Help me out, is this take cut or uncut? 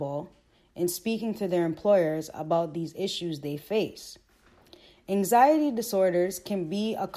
uncut